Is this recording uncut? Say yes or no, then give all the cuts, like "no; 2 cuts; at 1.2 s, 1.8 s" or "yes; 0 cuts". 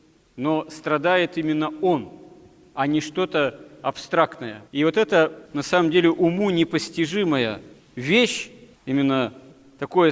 no; 2 cuts; at 4.7 s, 5.5 s